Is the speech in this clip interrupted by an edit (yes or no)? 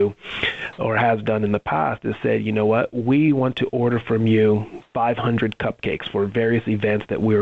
no